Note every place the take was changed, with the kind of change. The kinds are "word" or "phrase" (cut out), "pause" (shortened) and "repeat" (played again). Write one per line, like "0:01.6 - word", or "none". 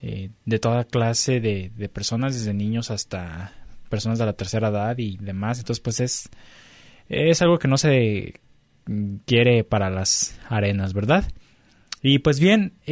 none